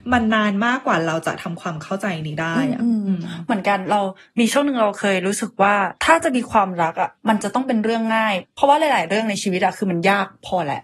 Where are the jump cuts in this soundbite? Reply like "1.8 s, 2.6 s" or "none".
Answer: 6.0 s, 7.1 s